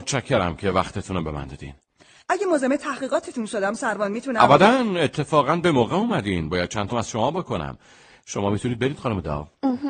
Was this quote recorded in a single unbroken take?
no; 1 cut; at 6.9 s

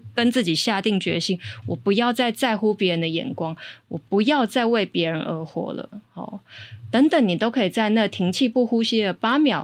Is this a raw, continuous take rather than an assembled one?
yes; 0 cuts

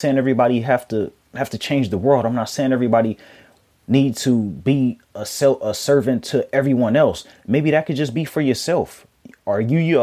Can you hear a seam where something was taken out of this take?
no; 0 cuts

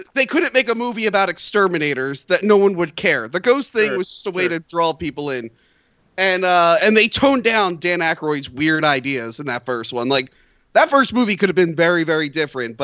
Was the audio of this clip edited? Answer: no; 0 cuts

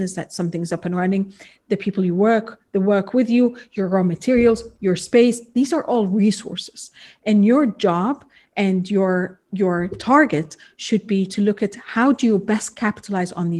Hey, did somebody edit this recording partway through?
no; 0 cuts

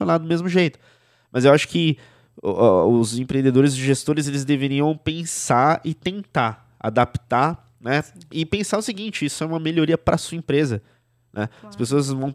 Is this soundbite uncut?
yes; 0 cuts

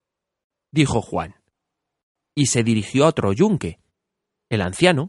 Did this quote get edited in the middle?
no; 0 cuts

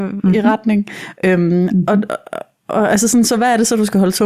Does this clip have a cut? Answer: no; 0 cuts

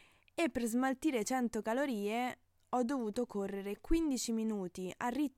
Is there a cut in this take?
no; 0 cuts

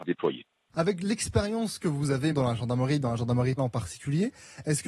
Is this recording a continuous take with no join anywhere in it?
no; 2 cuts; at 2.3 s, 3.6 s

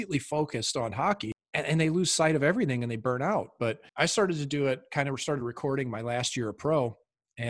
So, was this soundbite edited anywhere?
no; 0 cuts

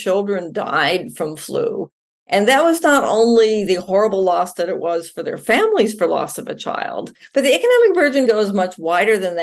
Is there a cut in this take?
yes; 1 cut; at 8.3 s

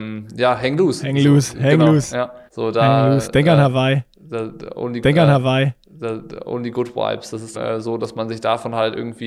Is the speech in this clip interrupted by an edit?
yes; 3 cuts; at 2.5 s, 5.0 s, 7.5 s

